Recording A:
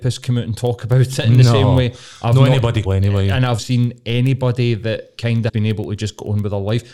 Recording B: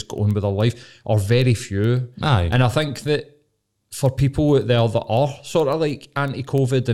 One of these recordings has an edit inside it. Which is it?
A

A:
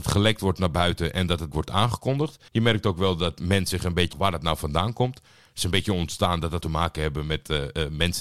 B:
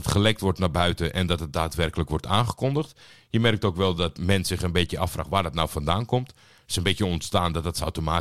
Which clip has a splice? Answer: A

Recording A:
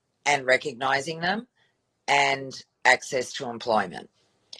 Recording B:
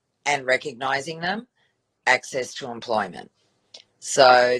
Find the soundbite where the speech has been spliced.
B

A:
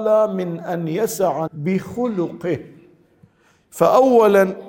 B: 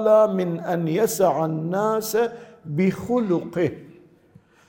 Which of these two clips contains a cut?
A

